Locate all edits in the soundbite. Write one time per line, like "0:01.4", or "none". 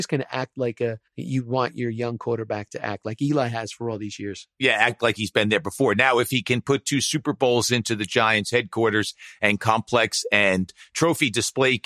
0:01.1

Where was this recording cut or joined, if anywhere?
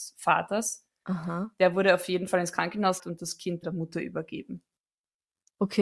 0:03.0
0:03.6

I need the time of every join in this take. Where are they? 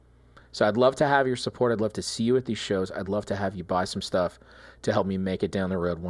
none

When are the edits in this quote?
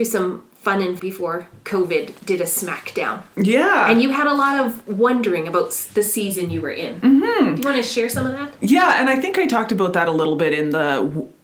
0:01.0

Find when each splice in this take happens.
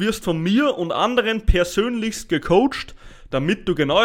none

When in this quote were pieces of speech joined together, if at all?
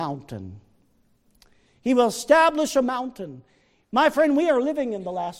none

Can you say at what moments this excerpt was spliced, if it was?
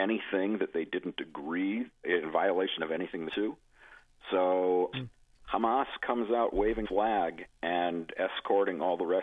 0:02.0
0:03.3
0:04.9
0:06.8

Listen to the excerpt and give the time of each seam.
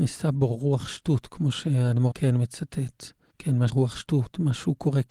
0:02.1
0:03.3
0:03.7

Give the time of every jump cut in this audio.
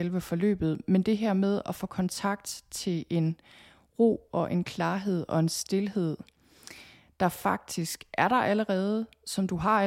none

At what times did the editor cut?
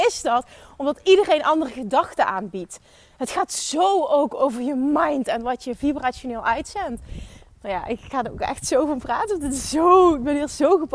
none

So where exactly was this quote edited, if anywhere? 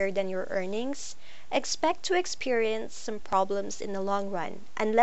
none

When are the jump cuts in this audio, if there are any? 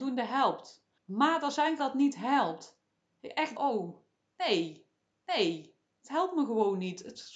0:01.0
0:01.8
0:03.6
0:05.1

